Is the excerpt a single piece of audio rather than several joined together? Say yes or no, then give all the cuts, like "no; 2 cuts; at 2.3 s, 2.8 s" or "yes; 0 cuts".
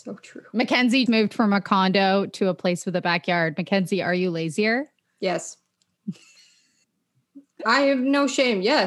no; 1 cut; at 1.1 s